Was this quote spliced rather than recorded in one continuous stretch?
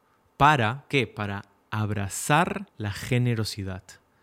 yes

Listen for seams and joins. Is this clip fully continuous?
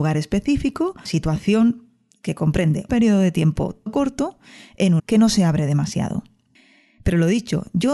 no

